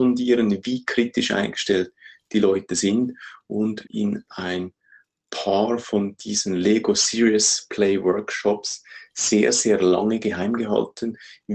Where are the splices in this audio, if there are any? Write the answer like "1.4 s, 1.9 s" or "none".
3.9 s